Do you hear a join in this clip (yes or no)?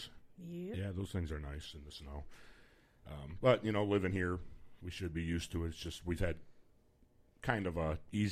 no